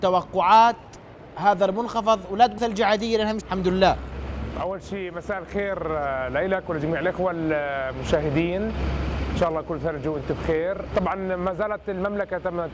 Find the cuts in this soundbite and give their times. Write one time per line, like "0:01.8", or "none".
0:02.6
0:03.4